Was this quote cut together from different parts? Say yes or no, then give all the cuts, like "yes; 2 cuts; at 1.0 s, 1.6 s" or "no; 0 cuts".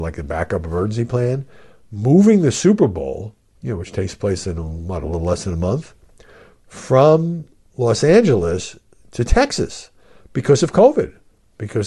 no; 0 cuts